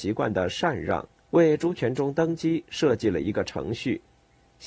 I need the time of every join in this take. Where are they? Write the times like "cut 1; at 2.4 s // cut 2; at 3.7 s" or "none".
cut 1; at 1.2 s